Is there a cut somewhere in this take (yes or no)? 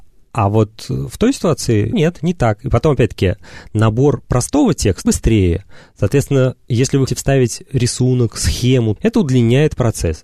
yes